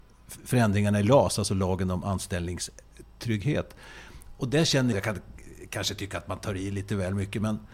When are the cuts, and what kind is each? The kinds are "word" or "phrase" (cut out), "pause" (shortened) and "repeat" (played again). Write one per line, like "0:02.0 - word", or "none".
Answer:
0:04.9 - word